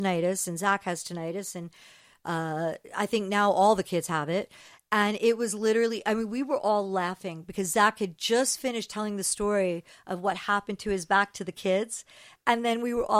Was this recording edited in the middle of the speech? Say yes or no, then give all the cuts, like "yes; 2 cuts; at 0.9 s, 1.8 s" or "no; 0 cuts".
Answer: no; 0 cuts